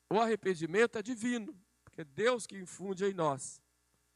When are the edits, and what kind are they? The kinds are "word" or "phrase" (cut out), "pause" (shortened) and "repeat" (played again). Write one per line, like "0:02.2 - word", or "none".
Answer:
none